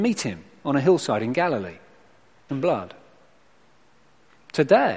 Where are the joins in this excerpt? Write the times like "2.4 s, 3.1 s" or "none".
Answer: 2.5 s